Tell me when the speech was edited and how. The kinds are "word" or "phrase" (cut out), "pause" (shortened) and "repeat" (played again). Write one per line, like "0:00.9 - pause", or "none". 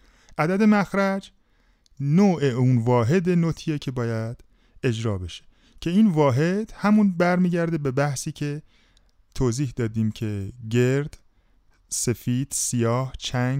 none